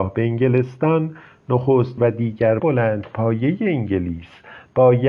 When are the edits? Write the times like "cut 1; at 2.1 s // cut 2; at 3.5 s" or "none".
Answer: cut 1; at 2.0 s // cut 2; at 2.6 s